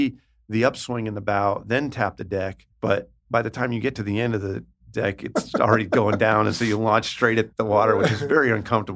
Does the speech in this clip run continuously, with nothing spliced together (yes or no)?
no